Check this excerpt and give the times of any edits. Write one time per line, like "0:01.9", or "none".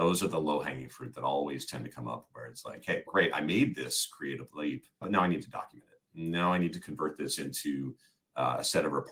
0:04.9